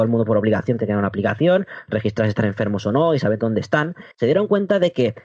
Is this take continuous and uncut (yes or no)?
no